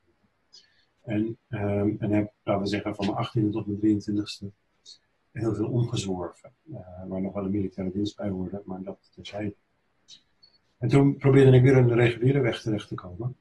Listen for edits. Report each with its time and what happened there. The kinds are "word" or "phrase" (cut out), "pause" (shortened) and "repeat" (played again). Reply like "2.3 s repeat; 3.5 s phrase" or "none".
none